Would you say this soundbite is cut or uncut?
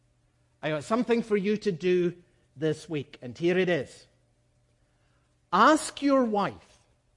uncut